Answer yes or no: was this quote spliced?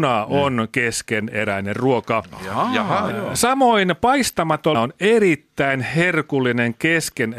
yes